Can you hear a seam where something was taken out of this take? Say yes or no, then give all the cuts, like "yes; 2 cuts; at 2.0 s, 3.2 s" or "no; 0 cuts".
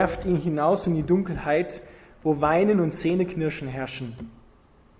no; 0 cuts